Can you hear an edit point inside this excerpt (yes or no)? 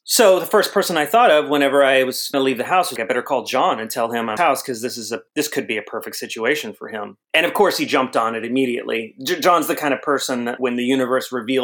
yes